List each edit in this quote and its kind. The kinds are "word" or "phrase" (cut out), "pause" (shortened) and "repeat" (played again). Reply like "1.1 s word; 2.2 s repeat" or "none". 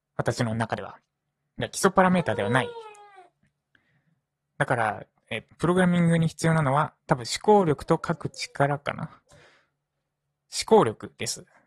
5.5 s word; 7.0 s pause